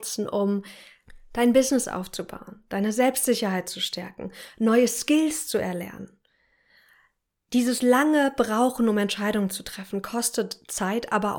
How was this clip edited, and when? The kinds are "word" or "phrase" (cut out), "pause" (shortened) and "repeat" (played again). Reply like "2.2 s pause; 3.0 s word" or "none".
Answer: none